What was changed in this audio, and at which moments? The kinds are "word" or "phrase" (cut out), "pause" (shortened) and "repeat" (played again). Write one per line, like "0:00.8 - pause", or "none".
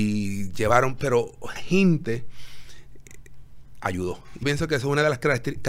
0:01.6 - word
0:04.4 - word

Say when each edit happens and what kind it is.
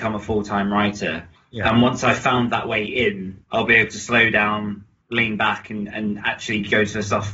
0:01.4 - pause
0:03.4 - pause
0:05.0 - pause

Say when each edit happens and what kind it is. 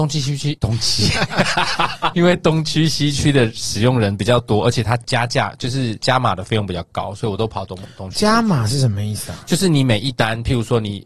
0:02.1 - phrase

